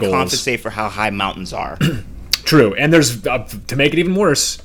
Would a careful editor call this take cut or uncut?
uncut